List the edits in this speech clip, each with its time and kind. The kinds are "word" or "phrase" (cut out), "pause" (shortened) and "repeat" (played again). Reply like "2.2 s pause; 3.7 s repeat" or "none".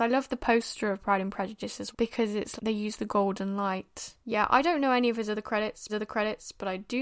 1.9 s word; 2.6 s word; 4.2 s pause; 5.9 s repeat